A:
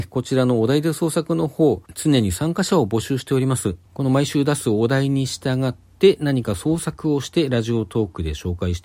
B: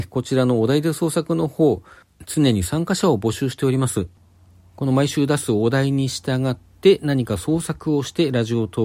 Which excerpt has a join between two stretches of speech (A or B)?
A